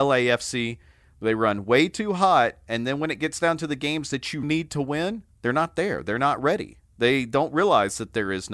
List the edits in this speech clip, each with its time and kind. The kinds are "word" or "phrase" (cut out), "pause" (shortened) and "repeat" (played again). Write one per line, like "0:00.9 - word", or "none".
0:04.4 - word
0:05.3 - pause